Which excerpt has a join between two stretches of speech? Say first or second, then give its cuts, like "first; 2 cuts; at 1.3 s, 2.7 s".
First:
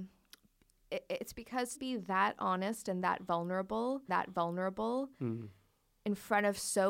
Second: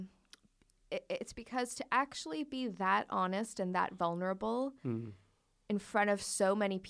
first; 2 cuts; at 1.7 s, 4.1 s